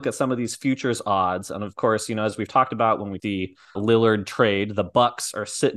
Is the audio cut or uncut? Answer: cut